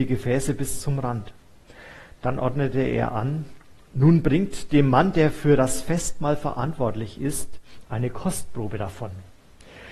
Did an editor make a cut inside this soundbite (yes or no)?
no